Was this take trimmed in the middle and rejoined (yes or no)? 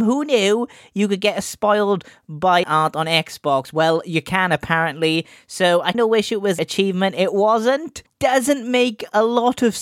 yes